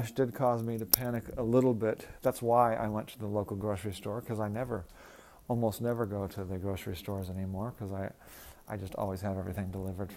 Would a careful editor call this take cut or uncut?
uncut